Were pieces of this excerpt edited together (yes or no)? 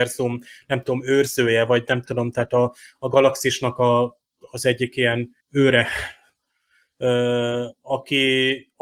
yes